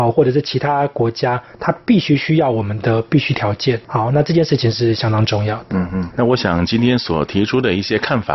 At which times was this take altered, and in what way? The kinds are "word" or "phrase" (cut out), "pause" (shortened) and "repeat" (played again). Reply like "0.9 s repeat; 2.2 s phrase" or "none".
3.8 s pause; 6.1 s word